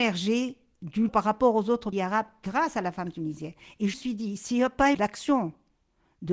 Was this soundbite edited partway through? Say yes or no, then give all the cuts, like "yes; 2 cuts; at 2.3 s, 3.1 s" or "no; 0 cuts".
yes; 4 cuts; at 1.1 s, 1.9 s, 3.9 s, 4.9 s